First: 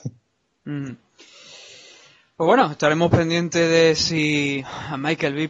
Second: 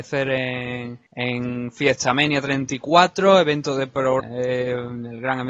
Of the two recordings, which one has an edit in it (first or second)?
second